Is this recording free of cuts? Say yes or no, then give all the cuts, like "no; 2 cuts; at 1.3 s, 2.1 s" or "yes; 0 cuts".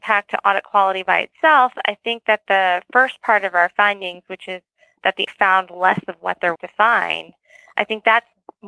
no; 2 cuts; at 5.3 s, 6.6 s